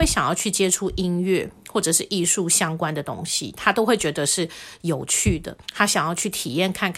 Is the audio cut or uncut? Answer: cut